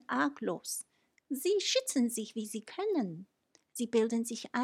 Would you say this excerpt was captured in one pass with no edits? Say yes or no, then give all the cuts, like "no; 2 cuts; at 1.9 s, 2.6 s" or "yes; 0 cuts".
yes; 0 cuts